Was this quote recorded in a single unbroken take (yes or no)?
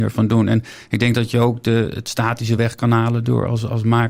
yes